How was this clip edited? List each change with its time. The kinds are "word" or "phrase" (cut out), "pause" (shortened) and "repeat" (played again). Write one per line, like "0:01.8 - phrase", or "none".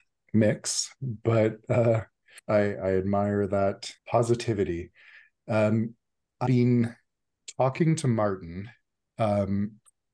0:02.4 - pause
0:04.0 - pause
0:06.5 - word

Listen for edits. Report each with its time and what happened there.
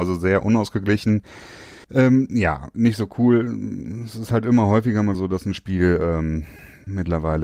0:01.8 - pause
0:05.1 - word

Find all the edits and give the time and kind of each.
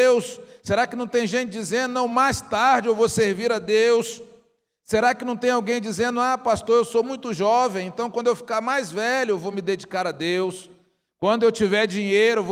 none

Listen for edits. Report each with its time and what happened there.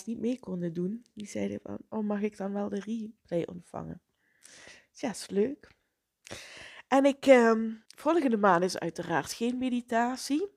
0:07.9 - pause

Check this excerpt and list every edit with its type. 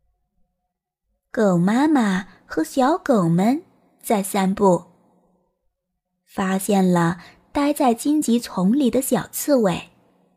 none

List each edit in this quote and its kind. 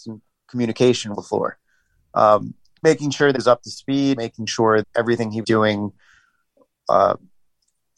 0:01.1 - word
0:02.8 - word
0:03.3 - word
0:04.2 - word
0:04.8 - word
0:05.4 - word

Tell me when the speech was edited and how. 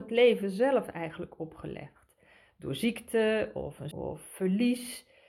0:03.9 - word

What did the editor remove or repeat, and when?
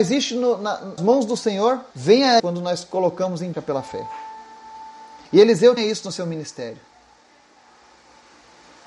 0:01.0 - word
0:01.9 - pause
0:02.4 - word
0:03.5 - word
0:05.2 - pause
0:05.8 - word

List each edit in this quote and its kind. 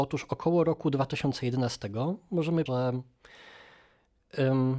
0:02.7 - word

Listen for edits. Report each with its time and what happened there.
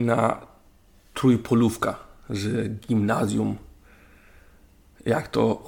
0:02.8 - pause

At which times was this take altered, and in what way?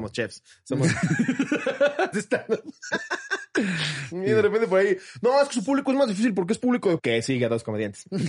0:02.1 - word
0:07.0 - word

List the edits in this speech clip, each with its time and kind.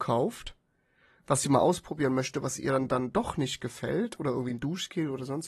none

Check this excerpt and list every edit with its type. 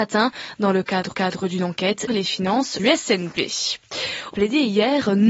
0:01.1 - repeat
0:02.1 - word
0:02.8 - word
0:04.3 - phrase

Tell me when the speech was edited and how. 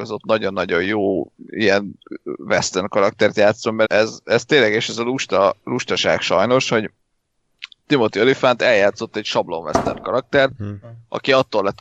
0:03.8 - word

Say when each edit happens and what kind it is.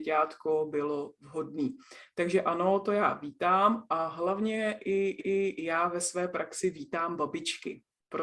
0:05.2 - repeat

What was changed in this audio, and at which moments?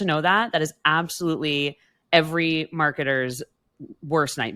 none

